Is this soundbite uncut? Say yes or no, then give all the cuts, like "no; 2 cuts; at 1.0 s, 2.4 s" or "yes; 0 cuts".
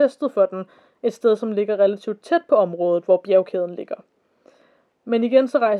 yes; 0 cuts